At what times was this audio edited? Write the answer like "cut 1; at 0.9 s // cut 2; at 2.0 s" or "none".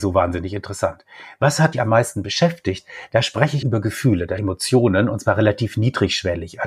cut 1; at 1.7 s // cut 2; at 3.6 s // cut 3; at 4.4 s